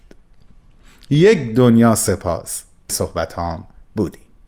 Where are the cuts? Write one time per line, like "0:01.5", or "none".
0:02.9